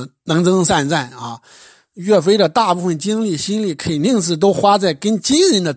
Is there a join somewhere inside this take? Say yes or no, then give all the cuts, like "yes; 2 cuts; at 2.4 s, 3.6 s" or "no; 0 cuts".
no; 0 cuts